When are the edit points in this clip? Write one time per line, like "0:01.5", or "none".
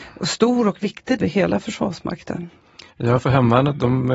0:01.2
0:02.9